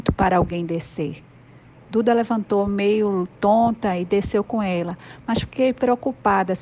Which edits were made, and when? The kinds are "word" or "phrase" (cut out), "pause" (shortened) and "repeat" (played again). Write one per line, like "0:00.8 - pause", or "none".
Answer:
none